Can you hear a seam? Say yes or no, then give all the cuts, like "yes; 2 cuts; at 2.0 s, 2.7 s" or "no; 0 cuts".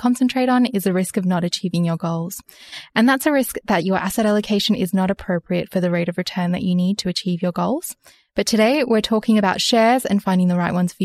no; 0 cuts